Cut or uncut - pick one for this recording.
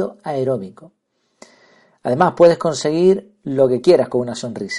uncut